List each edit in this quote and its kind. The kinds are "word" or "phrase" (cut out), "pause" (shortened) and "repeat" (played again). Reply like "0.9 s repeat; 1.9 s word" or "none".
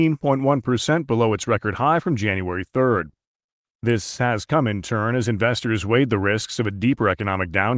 none